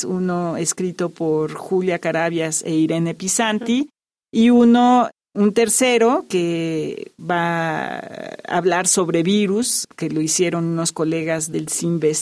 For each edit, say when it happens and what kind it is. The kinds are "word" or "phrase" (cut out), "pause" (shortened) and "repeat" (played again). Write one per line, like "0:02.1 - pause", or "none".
0:09.8 - word

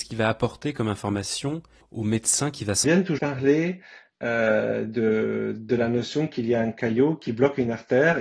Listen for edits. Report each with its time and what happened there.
0:01.8 - pause
0:02.8 - phrase
0:03.2 - word

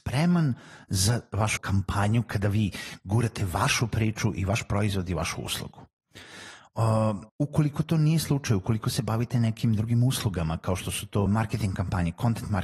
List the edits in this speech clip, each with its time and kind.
0:01.6 - word
0:07.3 - pause
0:11.3 - word

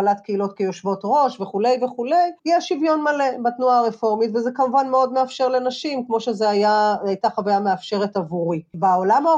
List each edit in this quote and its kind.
0:02.4 - pause

